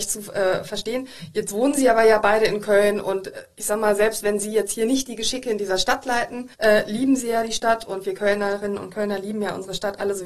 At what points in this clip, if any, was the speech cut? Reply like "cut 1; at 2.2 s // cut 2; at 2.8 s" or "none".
cut 1; at 6.5 s